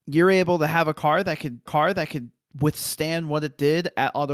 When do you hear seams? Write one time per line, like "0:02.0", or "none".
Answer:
0:01.7